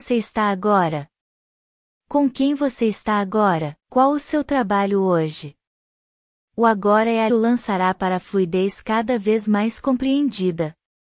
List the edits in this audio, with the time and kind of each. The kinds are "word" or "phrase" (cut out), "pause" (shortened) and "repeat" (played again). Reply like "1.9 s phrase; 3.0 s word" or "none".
3.8 s pause; 7.3 s phrase